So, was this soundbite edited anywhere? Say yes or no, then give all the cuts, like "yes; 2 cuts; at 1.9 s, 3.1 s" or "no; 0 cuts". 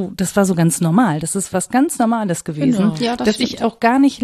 no; 0 cuts